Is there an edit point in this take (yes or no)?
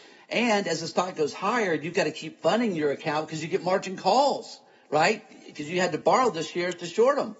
no